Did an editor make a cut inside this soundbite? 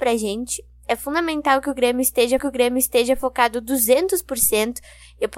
yes; 1 cut; at 2.4 s

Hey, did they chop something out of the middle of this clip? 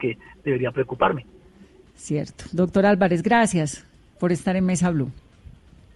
no; 0 cuts

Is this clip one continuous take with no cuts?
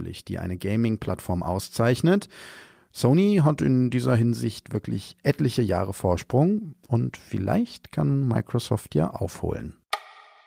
yes; 0 cuts

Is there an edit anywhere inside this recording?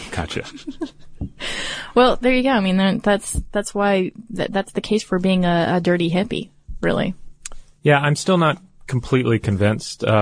no; 0 cuts

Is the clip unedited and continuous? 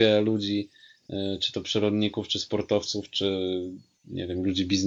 yes; 0 cuts

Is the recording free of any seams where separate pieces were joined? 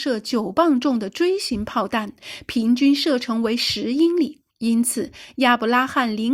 no; 1 cut; at 4.5 s

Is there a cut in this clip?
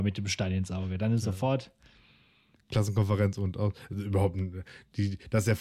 no; 0 cuts

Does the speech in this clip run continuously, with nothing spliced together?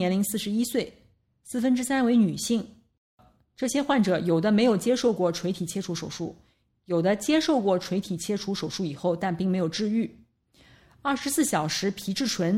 yes; 0 cuts

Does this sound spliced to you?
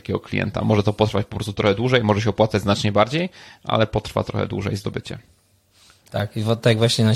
no; 0 cuts

